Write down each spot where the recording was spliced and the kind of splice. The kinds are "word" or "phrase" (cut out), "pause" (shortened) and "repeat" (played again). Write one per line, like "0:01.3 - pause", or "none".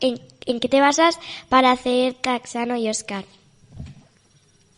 none